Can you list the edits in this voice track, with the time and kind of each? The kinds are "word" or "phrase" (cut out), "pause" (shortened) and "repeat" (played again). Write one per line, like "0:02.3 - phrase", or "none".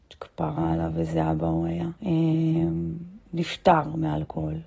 0:02.0 - pause